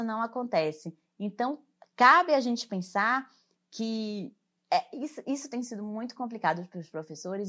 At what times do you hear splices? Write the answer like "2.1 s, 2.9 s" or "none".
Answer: 4.5 s